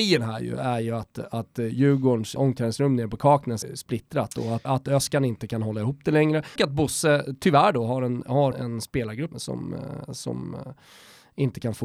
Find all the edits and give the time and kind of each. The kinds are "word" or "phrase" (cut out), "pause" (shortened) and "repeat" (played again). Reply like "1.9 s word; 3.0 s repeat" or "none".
2.4 s word; 3.6 s word; 4.6 s word; 6.6 s word; 8.5 s word; 9.3 s word